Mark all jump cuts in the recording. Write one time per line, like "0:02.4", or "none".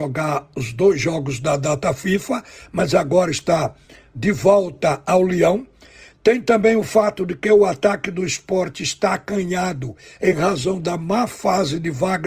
none